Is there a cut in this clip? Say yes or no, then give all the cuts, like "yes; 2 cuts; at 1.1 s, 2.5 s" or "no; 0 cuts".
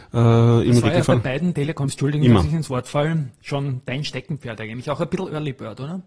no; 0 cuts